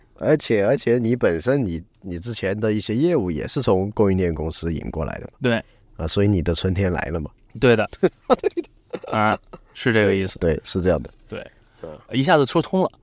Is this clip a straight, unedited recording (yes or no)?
yes